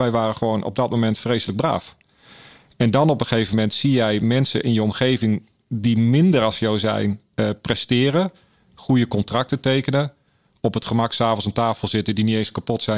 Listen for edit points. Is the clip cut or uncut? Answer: uncut